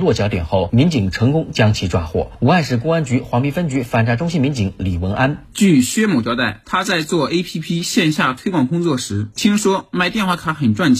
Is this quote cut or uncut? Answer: uncut